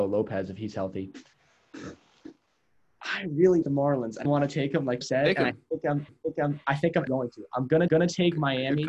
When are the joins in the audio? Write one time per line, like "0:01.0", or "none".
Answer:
0:01.3
0:03.6
0:04.2
0:05.0
0:06.1
0:07.1
0:07.9